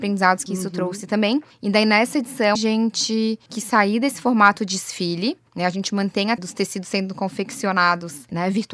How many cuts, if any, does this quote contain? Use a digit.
2